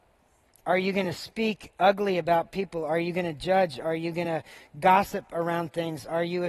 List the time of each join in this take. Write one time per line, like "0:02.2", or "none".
none